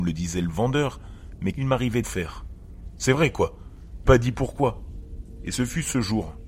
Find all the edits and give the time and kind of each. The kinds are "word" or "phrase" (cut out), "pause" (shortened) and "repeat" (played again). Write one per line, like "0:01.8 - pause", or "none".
0:01.5 - word
0:02.0 - phrase
0:04.1 - phrase